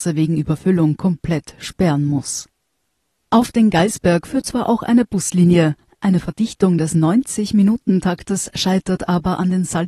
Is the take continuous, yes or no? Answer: yes